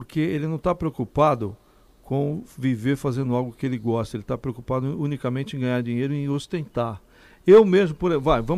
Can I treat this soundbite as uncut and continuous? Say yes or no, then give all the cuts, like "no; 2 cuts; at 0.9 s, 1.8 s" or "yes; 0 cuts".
yes; 0 cuts